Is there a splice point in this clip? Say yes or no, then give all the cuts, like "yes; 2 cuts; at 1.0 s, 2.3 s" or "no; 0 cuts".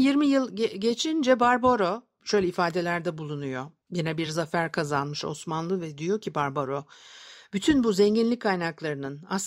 no; 0 cuts